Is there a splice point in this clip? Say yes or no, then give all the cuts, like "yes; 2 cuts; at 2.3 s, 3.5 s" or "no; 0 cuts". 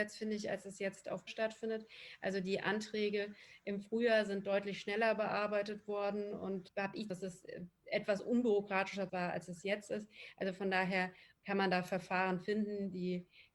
yes; 4 cuts; at 1.3 s, 6.7 s, 7.1 s, 9.1 s